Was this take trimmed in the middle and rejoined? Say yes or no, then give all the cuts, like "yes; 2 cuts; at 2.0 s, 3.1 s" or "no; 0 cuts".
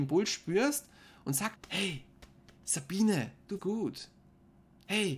yes; 2 cuts; at 1.6 s, 3.6 s